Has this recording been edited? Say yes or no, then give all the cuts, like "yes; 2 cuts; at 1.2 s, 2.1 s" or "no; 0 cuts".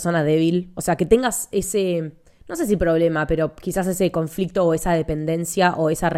no; 0 cuts